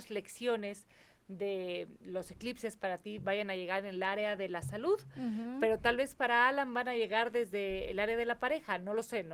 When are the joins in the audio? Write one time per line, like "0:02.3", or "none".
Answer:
none

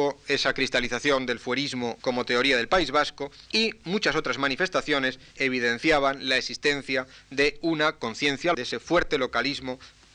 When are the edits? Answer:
0:02.0
0:03.5
0:05.4
0:08.5

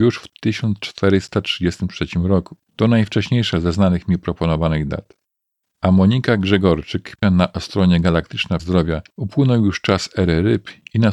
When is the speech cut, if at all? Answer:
0:02.7
0:05.4
0:07.2
0:08.6
0:09.1

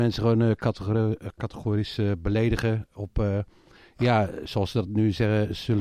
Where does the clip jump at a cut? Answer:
none

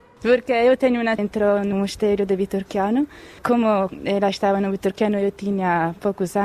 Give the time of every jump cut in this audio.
0:01.2
0:01.7

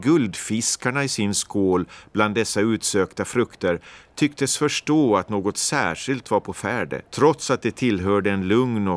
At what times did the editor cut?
0:07.1

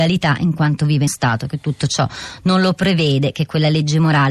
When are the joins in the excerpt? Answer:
0:01.1

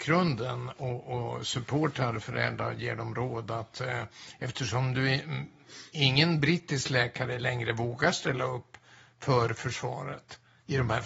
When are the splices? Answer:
none

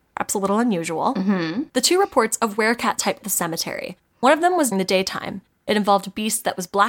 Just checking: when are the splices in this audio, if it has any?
0:03.2
0:04.7

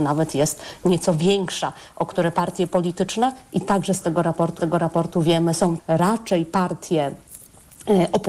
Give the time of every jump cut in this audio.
0:04.6
0:05.8

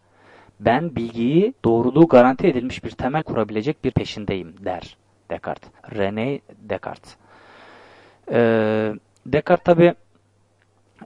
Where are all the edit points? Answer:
0:01.6
0:03.2
0:03.9
0:05.8
0:09.1

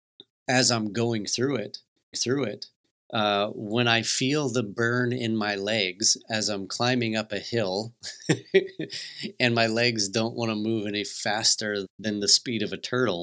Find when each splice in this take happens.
0:02.1
0:11.8

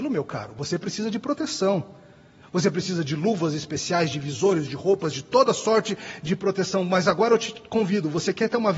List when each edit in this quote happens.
none

